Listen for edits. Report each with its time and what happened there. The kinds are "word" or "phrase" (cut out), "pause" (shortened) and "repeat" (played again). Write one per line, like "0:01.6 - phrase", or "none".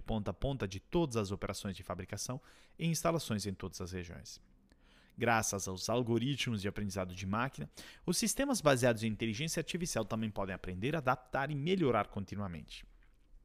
none

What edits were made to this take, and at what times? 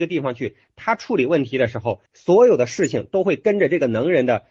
0:02.1 - pause

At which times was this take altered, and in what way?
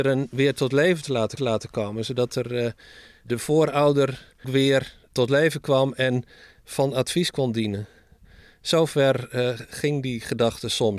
0:01.4 - repeat
0:04.4 - word

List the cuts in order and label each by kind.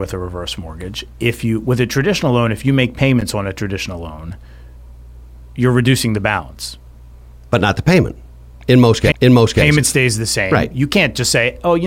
0:09.1 - repeat

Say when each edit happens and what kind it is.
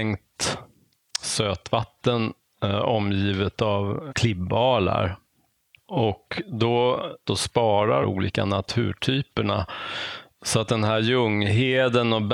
0:04.1 - word
0:07.3 - phrase
0:08.0 - phrase

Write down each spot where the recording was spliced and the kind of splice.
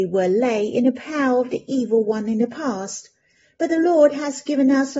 none

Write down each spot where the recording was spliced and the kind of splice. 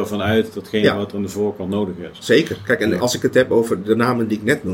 0:03.0 - word

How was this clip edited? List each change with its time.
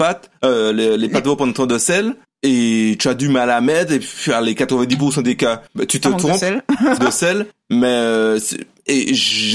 0:02.2 - pause
0:05.7 - pause
0:07.0 - word
0:07.5 - pause

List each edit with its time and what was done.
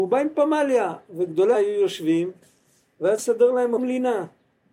0:01.5 - word
0:03.2 - word
0:03.8 - word

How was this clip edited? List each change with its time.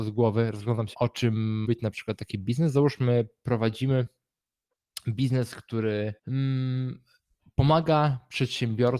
0:00.9 - phrase
0:01.6 - word
0:06.2 - pause

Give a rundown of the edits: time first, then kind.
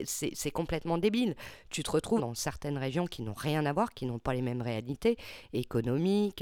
0:02.2 - phrase

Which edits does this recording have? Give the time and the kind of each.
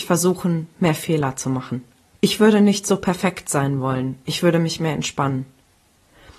0:02.1 - pause

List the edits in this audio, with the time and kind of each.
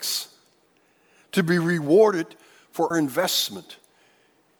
0:02.9 - word

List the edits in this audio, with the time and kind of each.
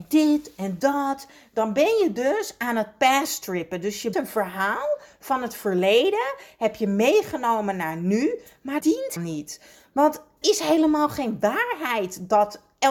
0:04.1 - word
0:08.8 - word
0:09.2 - word
0:10.4 - word

